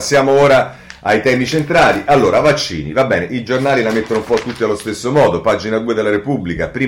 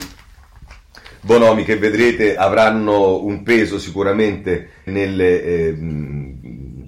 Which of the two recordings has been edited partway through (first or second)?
second